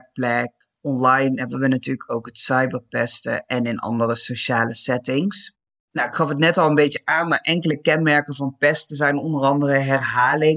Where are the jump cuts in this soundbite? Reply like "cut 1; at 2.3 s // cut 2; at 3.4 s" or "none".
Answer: none